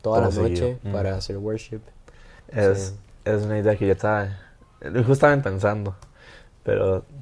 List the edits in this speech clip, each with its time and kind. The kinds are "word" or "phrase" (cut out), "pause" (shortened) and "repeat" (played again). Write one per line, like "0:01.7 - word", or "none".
0:02.4 - pause
0:04.0 - word
0:05.4 - phrase